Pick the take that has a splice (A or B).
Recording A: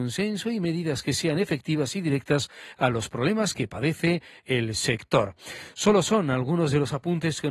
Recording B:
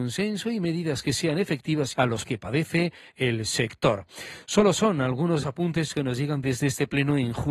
B